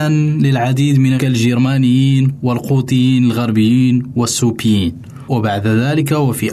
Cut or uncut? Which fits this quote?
cut